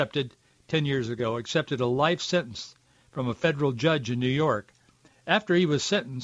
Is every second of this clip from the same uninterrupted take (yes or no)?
yes